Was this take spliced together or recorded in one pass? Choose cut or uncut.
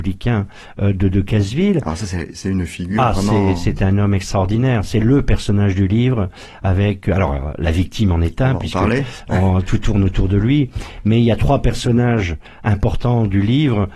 uncut